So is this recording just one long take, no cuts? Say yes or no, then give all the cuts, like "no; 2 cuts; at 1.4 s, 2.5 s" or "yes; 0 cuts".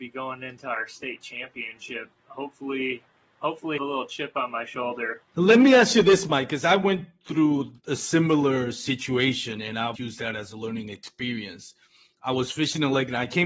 no; 5 cuts; at 2.2 s, 3.8 s, 5.3 s, 7.8 s, 9.9 s